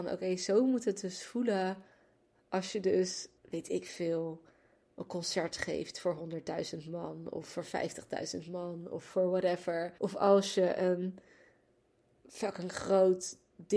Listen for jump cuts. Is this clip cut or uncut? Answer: cut